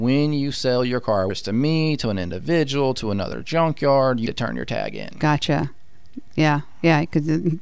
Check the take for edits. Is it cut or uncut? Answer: cut